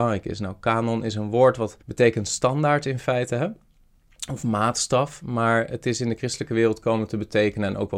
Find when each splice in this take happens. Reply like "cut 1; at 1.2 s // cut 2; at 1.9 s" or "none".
cut 1; at 1.8 s